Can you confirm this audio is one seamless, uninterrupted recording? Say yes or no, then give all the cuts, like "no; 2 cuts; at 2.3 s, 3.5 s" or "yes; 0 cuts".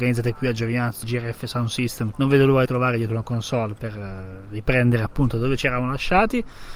no; 3 cuts; at 1.0 s, 2.1 s, 2.6 s